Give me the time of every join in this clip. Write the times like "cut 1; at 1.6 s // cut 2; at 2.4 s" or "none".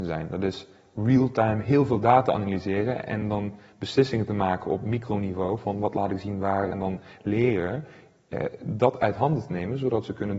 none